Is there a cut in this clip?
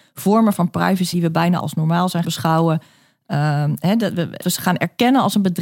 yes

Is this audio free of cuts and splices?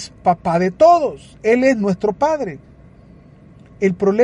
yes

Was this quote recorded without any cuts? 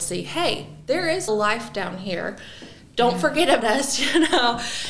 no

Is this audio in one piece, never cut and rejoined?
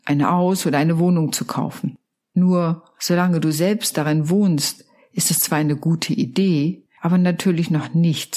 yes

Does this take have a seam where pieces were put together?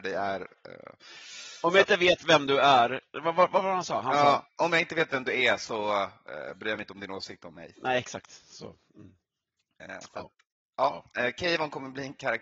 no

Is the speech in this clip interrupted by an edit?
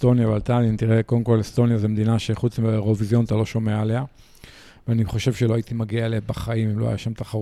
no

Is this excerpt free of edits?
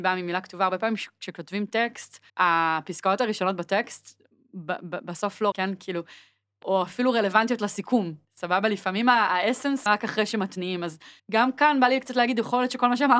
no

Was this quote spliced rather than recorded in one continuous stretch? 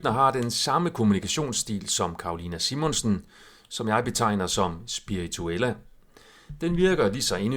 no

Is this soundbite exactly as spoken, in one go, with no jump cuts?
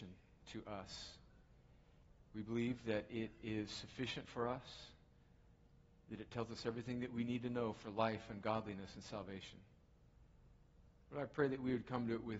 no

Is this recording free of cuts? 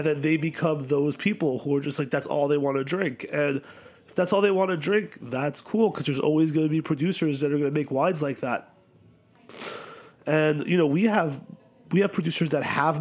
yes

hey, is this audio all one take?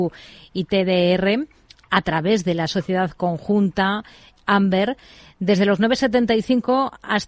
yes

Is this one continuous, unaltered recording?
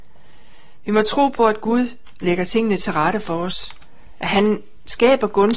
yes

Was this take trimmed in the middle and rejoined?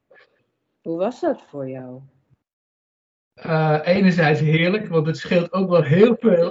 no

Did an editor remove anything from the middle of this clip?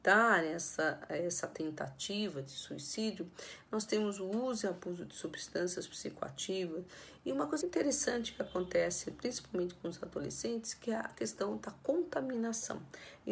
yes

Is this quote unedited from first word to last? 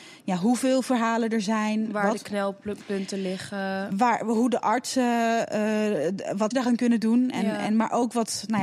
no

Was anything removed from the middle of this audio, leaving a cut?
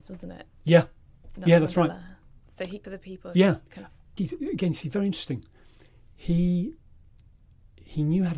yes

